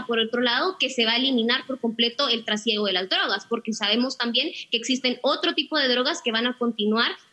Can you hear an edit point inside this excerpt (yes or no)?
no